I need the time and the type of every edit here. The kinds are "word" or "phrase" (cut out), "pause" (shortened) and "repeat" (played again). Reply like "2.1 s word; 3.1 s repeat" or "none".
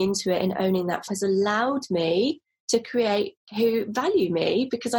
1.1 s word; 3.5 s word